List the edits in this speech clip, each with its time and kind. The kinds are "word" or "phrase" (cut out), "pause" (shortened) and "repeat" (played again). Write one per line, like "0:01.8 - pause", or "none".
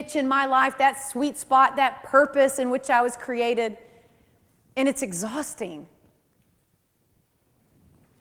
none